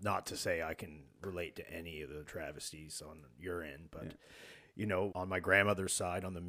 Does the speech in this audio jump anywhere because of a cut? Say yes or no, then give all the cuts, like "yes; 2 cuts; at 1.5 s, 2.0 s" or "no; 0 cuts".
yes; 1 cut; at 5.1 s